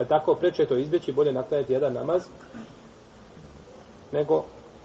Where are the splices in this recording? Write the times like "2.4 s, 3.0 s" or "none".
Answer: none